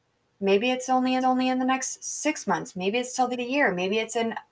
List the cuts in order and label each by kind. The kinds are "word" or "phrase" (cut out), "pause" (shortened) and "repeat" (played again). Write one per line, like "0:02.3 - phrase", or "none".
0:01.2 - repeat
0:03.3 - word